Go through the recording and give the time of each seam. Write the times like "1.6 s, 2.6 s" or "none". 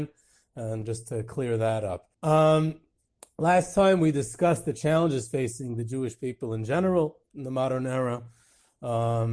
2.1 s